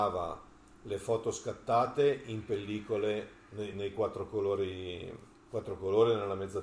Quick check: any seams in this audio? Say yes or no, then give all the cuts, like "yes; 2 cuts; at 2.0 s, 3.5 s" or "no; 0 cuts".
yes; 2 cuts; at 3.7 s, 5.4 s